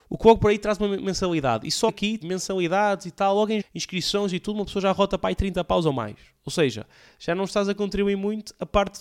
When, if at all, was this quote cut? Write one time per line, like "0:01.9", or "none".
0:01.9
0:02.2
0:03.6

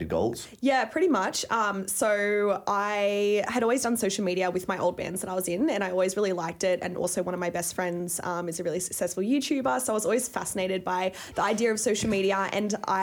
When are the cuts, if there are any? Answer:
none

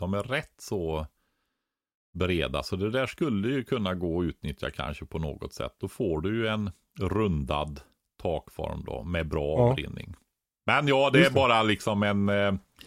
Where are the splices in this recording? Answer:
none

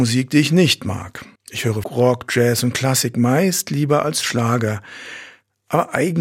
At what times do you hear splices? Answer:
0:01.4
0:01.8

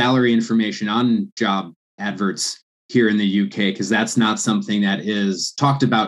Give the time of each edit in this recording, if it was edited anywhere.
none

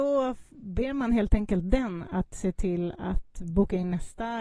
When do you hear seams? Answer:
none

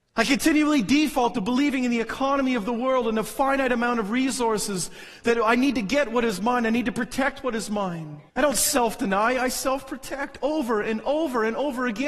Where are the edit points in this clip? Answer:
0:08.3

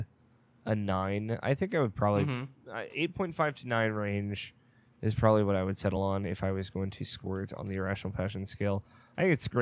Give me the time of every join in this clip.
none

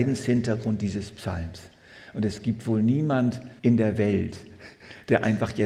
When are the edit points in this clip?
0:03.6

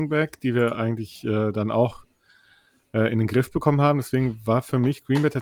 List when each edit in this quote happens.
none

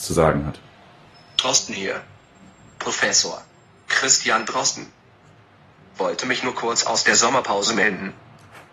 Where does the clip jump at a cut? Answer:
none

